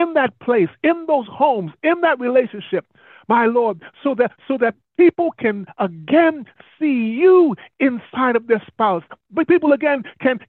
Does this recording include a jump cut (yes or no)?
no